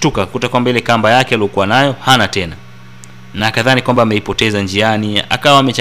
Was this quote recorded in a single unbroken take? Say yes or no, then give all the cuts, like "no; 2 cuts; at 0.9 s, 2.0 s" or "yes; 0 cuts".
yes; 0 cuts